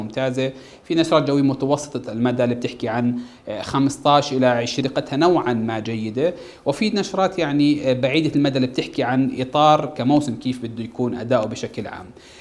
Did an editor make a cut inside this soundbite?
yes; 1 cut; at 4.8 s

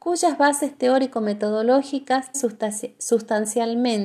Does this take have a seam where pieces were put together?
yes; 1 cut; at 2.3 s

